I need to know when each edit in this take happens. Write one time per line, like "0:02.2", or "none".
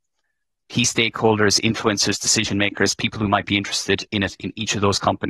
none